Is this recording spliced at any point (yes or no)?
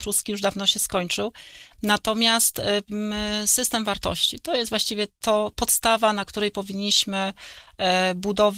no